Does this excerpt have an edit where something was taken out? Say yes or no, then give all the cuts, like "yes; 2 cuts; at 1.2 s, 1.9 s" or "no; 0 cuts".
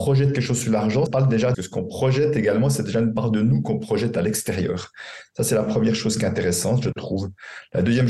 yes; 2 cuts; at 1.1 s, 1.5 s